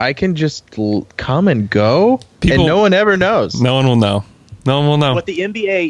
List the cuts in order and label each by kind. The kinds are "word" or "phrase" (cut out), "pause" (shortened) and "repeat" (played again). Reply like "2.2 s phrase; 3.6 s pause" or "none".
4.6 s pause